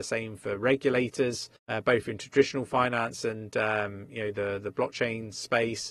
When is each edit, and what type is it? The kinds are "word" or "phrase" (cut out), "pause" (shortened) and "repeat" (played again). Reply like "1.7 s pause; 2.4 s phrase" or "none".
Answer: 1.6 s pause